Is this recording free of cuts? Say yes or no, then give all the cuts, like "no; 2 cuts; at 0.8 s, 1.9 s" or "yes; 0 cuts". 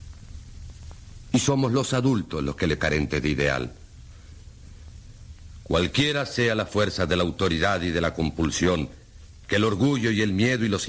no; 1 cut; at 2.8 s